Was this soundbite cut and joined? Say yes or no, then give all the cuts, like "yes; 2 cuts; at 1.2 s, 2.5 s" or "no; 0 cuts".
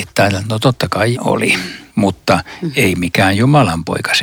yes; 2 cuts; at 1.1 s, 1.9 s